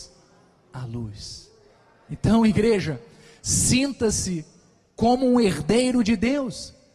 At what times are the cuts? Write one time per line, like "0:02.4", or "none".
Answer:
none